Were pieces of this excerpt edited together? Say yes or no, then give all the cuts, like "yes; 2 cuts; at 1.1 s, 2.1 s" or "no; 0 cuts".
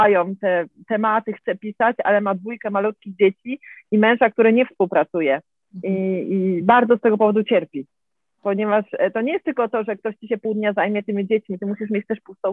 no; 0 cuts